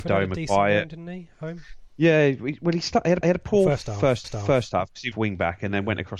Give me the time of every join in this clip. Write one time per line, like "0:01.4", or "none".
0:03.2
0:04.2
0:05.1